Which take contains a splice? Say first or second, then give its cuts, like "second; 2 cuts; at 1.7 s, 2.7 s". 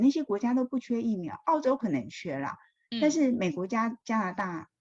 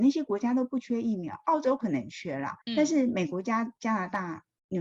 second; 1 cut; at 2.6 s